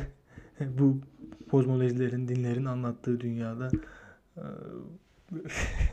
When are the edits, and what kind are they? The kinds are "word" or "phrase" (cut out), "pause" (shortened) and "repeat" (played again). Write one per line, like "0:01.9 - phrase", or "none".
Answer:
none